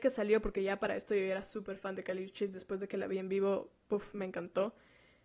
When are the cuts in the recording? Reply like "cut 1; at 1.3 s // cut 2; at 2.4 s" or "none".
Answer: none